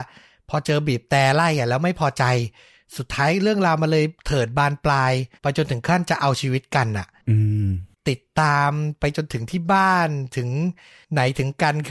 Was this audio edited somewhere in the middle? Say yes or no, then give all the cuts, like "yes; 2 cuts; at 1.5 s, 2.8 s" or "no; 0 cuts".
yes; 1 cut; at 5.4 s